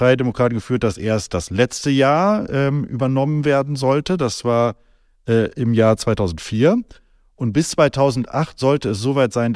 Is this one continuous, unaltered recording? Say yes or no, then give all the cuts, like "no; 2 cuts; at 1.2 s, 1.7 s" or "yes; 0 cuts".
yes; 0 cuts